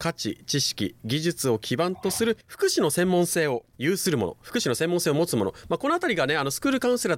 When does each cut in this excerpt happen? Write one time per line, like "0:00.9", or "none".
0:02.4
0:03.7